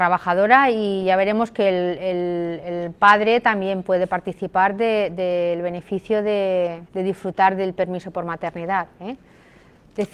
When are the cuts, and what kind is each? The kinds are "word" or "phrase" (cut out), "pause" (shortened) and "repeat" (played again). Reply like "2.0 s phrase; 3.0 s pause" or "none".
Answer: 6.9 s pause